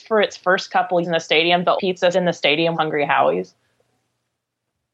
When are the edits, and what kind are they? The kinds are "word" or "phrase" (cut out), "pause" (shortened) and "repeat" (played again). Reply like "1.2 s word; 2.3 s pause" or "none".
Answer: 1.0 s word; 1.8 s word; 2.1 s word; 2.7 s word